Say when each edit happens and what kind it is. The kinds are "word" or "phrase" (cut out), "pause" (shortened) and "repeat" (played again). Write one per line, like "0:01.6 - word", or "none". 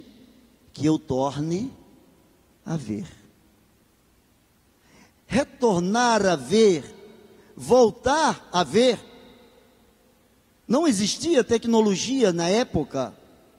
none